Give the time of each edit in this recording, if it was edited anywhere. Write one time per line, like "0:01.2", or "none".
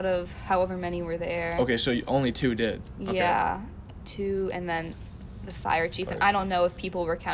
none